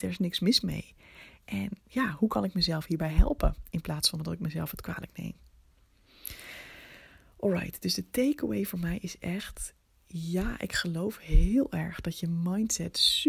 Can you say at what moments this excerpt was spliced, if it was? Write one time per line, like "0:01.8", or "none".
0:01.8